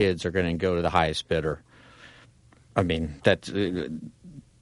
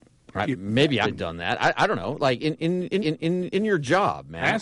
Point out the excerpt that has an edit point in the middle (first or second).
second